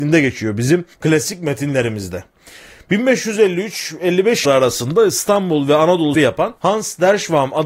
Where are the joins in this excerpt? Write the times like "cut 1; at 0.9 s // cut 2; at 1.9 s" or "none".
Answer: cut 1; at 0.9 s // cut 2; at 4.4 s // cut 3; at 6.1 s // cut 4; at 6.6 s